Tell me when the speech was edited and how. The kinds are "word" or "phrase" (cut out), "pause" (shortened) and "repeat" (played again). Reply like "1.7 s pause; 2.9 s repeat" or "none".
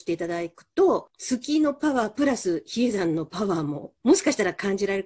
4.0 s pause